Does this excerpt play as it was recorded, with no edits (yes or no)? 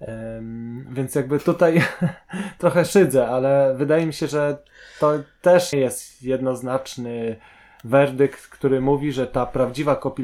no